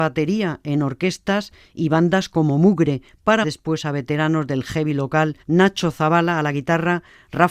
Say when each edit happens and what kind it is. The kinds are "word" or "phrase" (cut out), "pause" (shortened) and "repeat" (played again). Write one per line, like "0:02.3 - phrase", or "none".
0:03.4 - word
0:05.4 - pause